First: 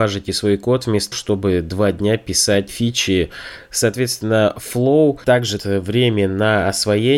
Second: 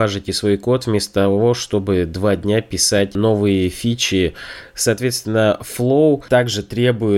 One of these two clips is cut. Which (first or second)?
first